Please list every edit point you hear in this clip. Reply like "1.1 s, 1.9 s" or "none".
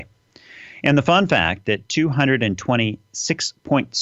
none

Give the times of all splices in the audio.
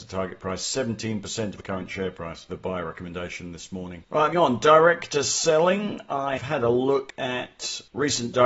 1.6 s, 2.5 s, 4.3 s, 6.4 s

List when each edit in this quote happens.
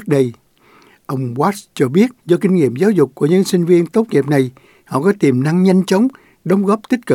2.2 s

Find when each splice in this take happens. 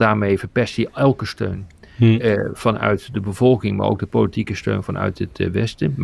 none

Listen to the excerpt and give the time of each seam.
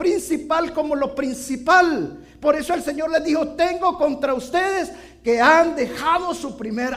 none

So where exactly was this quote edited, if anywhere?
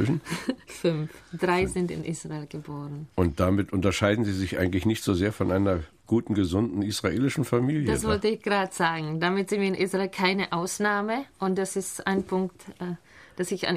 3.1 s

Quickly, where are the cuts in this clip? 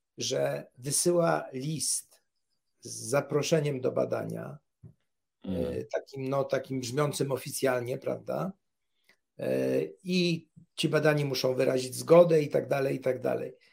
none

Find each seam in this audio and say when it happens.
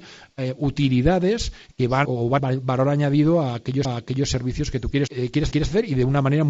2.0 s, 2.4 s, 3.8 s, 5.1 s, 5.5 s

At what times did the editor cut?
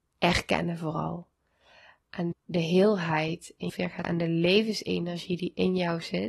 2.3 s, 3.7 s, 4.0 s

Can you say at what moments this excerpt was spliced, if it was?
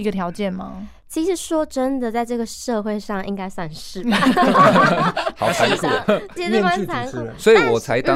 6.4 s

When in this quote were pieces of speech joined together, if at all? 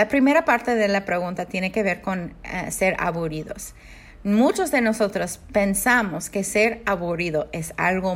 none

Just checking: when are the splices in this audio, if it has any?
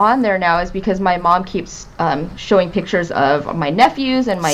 none

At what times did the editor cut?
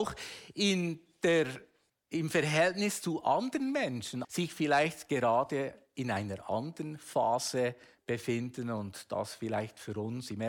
1.9 s, 4.2 s

